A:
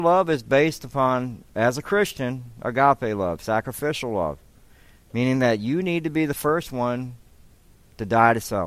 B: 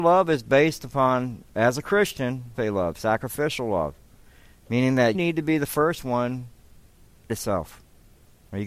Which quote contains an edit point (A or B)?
B